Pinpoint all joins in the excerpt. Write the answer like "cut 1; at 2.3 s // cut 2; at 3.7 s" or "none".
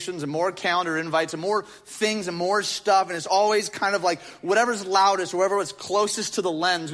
none